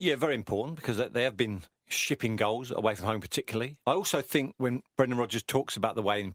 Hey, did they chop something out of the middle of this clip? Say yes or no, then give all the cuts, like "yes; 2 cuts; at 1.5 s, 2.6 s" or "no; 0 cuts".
no; 0 cuts